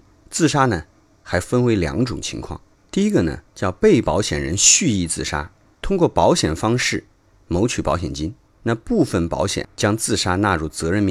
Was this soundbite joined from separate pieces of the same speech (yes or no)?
yes